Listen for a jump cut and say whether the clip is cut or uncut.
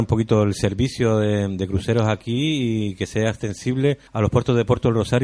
cut